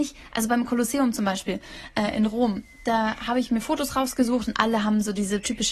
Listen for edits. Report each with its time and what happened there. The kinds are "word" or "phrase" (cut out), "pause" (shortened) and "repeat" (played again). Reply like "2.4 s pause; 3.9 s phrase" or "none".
none

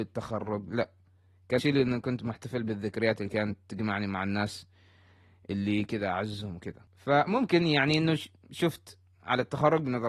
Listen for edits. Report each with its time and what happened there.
1.6 s word

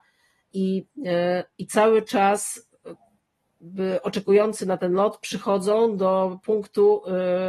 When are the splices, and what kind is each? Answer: none

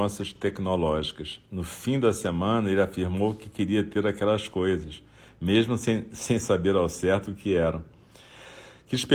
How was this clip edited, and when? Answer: none

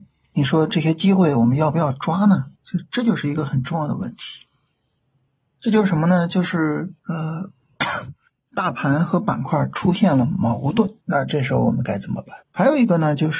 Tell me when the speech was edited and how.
2.6 s pause; 7.0 s pause; 8.3 s pause; 11.0 s pause; 12.4 s pause

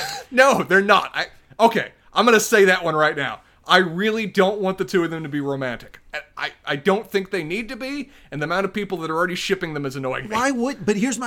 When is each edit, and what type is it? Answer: none

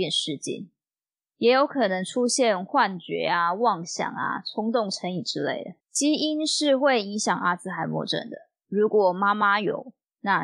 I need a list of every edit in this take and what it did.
5.8 s pause

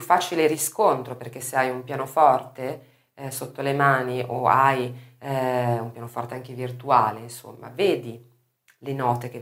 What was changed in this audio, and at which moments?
none

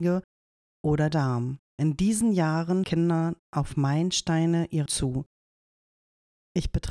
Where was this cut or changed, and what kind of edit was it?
1.1 s word; 1.6 s pause; 2.8 s word; 3.4 s pause; 4.9 s word

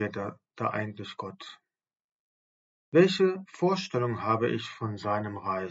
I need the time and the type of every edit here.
none

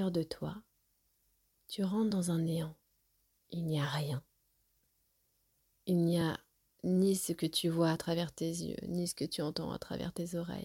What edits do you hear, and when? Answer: none

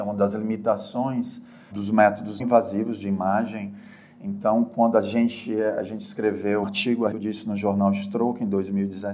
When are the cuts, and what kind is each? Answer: 1.7 s word; 2.4 s word; 6.6 s word; 7.1 s word

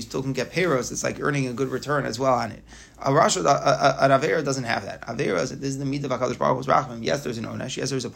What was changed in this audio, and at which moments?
none

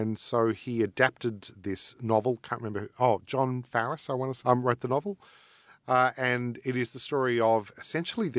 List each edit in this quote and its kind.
1.5 s word; 4.4 s word

